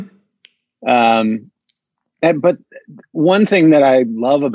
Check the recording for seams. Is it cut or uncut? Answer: uncut